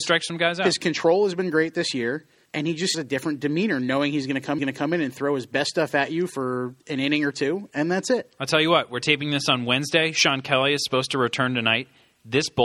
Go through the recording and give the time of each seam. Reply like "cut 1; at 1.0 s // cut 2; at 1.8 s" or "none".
cut 1; at 2.5 s // cut 2; at 2.9 s // cut 3; at 4.6 s // cut 4; at 6.8 s

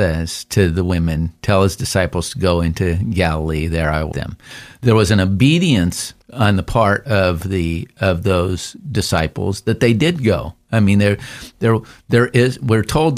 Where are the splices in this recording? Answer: cut 1; at 4.1 s // cut 2; at 6.2 s

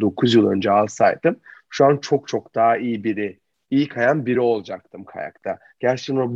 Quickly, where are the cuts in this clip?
none

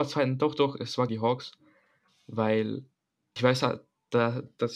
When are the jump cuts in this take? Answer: cut 1; at 1.1 s // cut 2; at 3.4 s

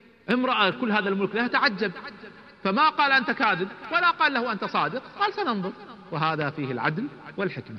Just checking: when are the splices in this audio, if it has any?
none

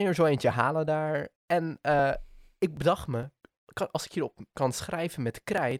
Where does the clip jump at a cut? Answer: cut 1; at 1.4 s // cut 2; at 4.5 s

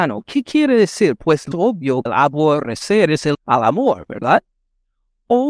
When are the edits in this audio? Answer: cut 1; at 1.5 s // cut 2; at 2.1 s // cut 3; at 3.3 s

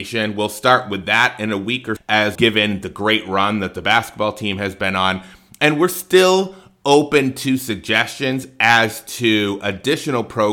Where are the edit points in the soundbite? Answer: cut 1; at 2.0 s // cut 2; at 2.3 s

